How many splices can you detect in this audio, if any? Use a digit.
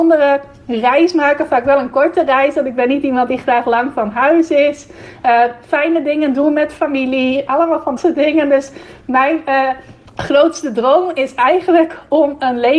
2